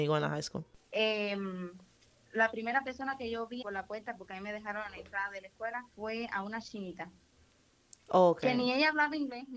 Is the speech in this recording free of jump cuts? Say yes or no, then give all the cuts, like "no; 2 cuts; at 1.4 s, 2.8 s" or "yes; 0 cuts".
no; 2 cuts; at 3.6 s, 5.9 s